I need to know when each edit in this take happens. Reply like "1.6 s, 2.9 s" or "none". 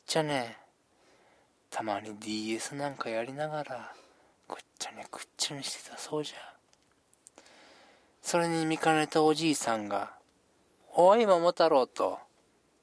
none